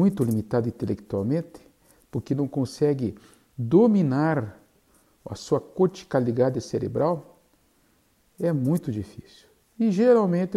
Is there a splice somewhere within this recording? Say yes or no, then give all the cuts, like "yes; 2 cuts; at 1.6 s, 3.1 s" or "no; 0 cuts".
no; 0 cuts